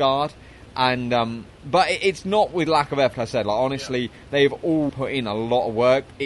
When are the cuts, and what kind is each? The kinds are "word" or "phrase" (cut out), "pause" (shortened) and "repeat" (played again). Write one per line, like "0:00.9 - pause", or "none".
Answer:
0:03.1 - word
0:04.9 - word